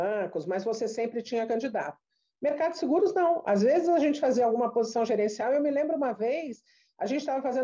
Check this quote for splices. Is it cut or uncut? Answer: uncut